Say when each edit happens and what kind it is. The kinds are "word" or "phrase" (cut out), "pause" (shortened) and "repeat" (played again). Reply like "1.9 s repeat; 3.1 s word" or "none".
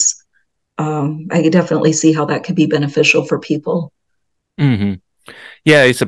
none